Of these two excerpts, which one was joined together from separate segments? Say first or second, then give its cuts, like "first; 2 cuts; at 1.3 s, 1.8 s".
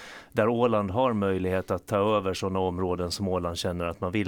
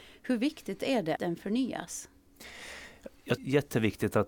second; 2 cuts; at 1.2 s, 3.4 s